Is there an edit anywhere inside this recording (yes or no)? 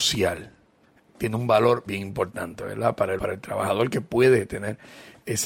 yes